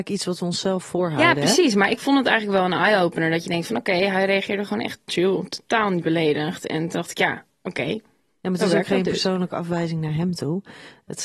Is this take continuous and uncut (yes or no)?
no